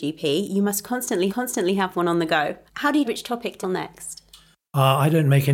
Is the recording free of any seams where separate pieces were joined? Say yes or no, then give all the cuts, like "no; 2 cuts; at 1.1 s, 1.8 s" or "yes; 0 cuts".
no; 4 cuts; at 1.3 s, 2.7 s, 3.0 s, 3.6 s